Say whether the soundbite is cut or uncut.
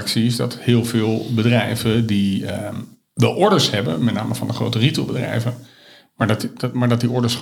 uncut